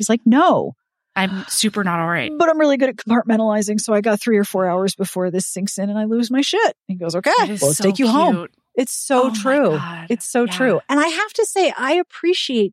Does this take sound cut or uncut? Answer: uncut